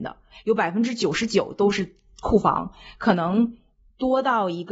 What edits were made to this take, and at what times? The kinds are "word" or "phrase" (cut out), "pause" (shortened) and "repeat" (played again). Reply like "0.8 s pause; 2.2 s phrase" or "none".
none